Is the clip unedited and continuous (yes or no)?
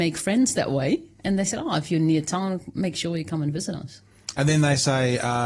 yes